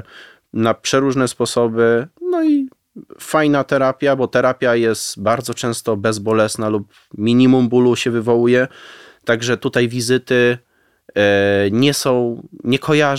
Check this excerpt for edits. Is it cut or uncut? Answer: uncut